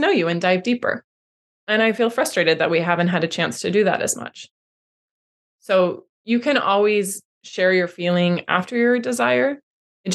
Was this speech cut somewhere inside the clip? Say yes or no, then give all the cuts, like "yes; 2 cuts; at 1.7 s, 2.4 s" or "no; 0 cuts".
no; 0 cuts